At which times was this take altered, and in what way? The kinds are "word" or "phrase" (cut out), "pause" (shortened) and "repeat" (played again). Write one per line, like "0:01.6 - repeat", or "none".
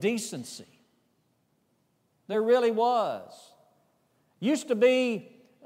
none